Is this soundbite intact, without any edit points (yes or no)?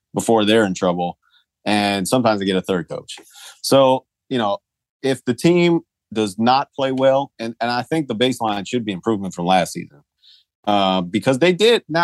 yes